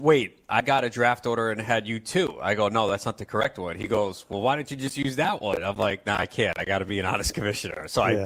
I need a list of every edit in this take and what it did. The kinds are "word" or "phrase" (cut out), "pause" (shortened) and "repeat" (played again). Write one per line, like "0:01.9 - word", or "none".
none